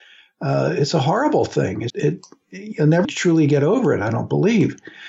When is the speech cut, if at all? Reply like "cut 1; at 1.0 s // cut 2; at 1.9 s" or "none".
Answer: cut 1; at 1.9 s // cut 2; at 3.0 s